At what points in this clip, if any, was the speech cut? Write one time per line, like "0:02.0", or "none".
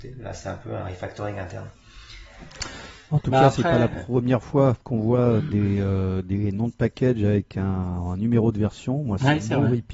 none